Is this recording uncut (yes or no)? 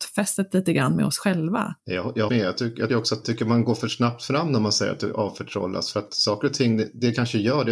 no